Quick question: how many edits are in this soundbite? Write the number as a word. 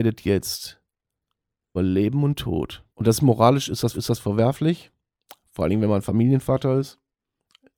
three